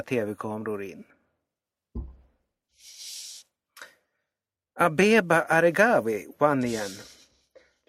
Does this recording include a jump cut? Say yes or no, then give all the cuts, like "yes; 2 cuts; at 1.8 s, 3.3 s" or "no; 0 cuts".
no; 0 cuts